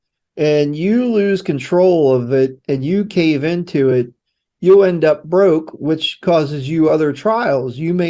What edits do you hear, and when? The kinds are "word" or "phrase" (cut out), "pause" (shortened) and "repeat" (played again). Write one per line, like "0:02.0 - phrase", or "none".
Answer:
none